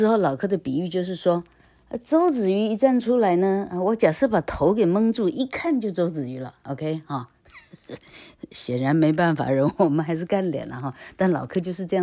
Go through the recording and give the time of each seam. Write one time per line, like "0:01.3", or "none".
0:08.0